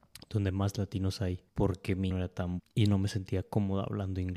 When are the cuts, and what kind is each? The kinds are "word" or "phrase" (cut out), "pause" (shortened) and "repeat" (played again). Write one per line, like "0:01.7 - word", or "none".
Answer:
0:01.5 - pause
0:02.1 - phrase
0:02.6 - word